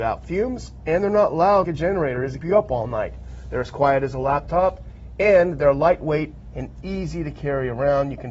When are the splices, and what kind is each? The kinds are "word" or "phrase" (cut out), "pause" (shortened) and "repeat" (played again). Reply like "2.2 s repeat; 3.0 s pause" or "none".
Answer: 1.6 s word; 2.4 s word